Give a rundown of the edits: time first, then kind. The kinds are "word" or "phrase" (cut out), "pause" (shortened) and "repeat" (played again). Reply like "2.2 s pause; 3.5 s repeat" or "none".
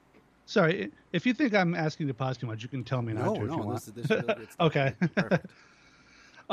none